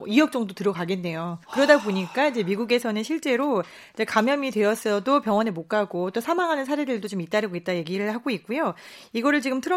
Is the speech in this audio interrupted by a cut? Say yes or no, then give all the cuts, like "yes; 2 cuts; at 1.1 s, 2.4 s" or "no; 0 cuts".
yes; 1 cut; at 1.4 s